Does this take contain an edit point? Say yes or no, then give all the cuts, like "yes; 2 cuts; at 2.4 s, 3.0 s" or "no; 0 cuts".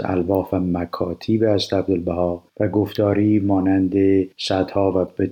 yes; 2 cuts; at 2.5 s, 4.3 s